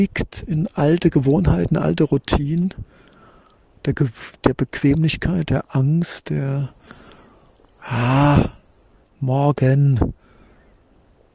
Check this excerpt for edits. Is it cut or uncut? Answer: uncut